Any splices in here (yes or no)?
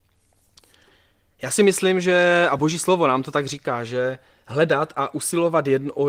no